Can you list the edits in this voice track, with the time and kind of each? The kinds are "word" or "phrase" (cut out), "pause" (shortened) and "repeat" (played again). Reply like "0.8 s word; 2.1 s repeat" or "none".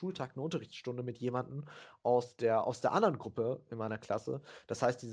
none